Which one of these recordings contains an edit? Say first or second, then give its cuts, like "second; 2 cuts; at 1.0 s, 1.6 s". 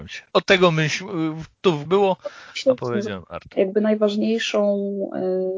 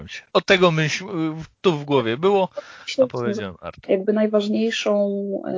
first; 1 cut; at 1.9 s